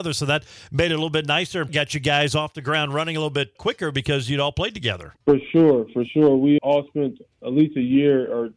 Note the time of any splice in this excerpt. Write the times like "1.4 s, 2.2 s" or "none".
1.7 s, 3.6 s, 5.2 s, 6.6 s, 7.3 s